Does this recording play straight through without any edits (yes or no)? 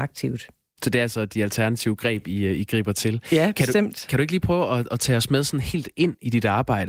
yes